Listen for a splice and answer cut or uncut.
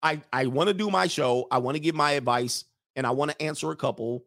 uncut